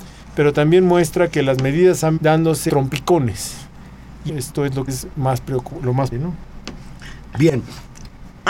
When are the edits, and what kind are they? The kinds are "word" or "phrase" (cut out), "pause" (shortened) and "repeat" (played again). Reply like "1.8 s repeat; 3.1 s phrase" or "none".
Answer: 2.2 s word; 2.7 s word; 4.3 s word; 4.9 s word; 6.1 s word